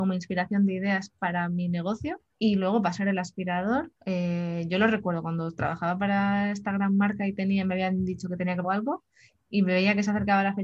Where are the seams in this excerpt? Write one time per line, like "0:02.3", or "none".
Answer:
0:02.3
0:04.0
0:08.6